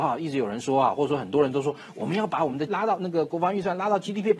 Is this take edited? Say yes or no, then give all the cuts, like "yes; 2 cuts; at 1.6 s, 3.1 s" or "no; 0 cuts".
yes; 1 cut; at 2.7 s